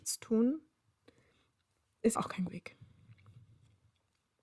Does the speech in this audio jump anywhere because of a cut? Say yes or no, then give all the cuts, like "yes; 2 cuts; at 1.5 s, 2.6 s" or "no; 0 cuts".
yes; 2 cuts; at 2.2 s, 2.5 s